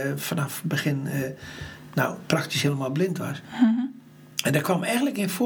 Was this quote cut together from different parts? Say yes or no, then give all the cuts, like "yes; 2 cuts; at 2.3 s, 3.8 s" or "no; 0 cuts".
no; 0 cuts